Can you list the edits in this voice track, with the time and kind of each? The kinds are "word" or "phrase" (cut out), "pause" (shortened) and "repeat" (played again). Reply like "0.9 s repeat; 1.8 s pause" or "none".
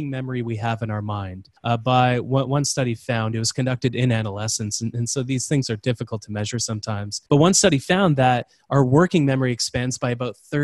1.6 s pause; 7.3 s pause